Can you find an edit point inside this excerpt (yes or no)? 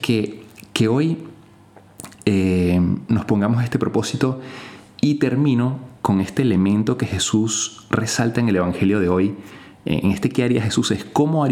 no